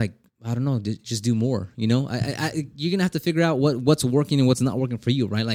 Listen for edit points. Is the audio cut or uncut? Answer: uncut